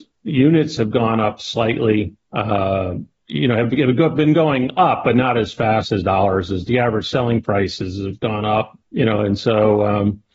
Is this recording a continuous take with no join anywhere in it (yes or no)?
no